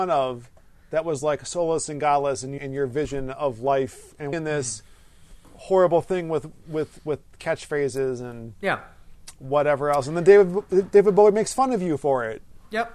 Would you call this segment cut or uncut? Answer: cut